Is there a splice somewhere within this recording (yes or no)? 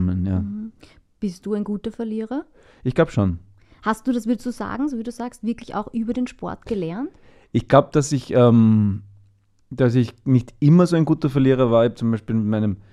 no